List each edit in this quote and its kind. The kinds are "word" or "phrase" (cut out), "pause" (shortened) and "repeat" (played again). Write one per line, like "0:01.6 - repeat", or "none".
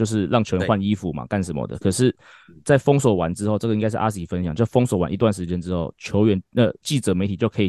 none